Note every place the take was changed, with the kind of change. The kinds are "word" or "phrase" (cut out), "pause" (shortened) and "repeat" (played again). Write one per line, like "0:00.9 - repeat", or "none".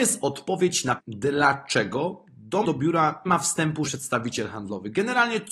0:01.0 - word
0:02.6 - word
0:03.3 - word
0:03.9 - word